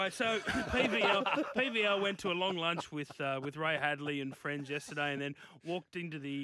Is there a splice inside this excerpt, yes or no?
no